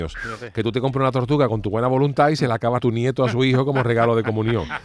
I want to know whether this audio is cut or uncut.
cut